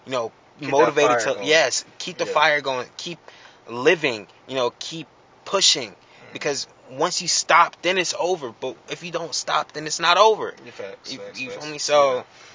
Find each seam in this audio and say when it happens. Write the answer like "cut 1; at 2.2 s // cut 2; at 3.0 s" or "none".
none